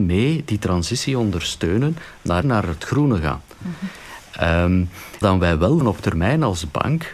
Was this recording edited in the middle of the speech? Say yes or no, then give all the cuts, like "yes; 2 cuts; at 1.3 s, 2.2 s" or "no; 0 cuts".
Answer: yes; 3 cuts; at 2.4 s, 5.2 s, 5.8 s